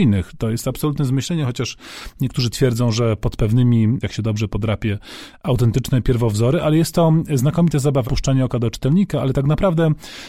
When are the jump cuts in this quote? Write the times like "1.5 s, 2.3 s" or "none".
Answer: 4.0 s, 8.0 s